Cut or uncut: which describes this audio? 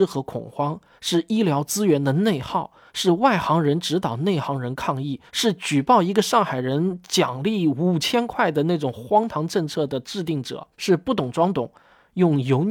cut